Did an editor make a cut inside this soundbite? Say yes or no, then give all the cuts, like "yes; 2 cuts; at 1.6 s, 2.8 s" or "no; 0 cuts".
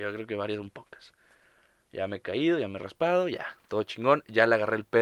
no; 0 cuts